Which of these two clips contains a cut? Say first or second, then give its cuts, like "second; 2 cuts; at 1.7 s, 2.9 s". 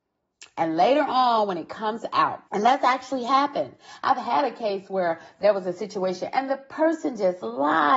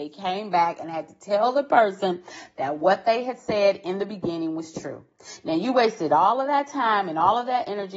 first; 1 cut; at 2.5 s